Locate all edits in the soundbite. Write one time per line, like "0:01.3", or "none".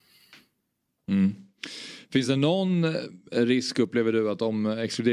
none